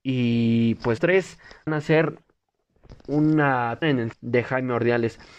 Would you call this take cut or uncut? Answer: cut